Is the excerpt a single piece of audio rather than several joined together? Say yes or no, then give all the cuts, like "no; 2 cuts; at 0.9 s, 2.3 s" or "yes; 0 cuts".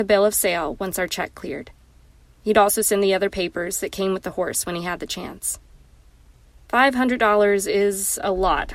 yes; 0 cuts